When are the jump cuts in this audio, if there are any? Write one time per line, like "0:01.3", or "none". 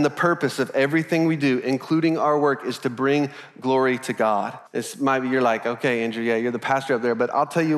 0:04.7

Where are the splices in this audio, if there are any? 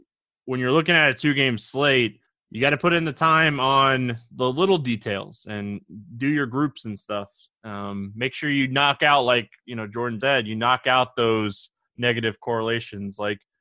0:02.3
0:10.2

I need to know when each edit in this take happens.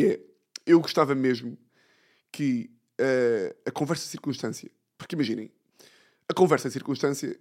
none

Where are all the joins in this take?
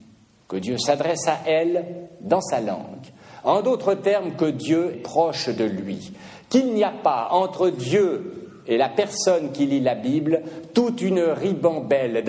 0:04.9

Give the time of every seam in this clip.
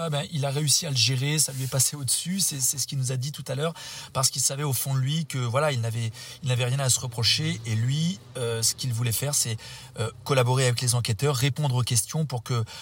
none

